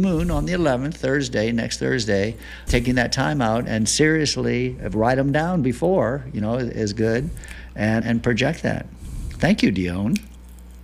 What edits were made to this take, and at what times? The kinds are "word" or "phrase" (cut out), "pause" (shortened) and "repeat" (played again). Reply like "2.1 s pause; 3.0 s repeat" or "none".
2.7 s word; 3.7 s word; 8.0 s word